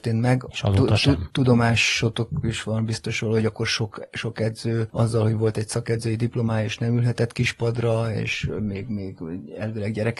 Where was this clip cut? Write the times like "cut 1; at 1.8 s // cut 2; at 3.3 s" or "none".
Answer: none